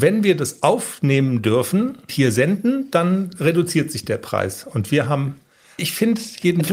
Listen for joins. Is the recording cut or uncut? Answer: cut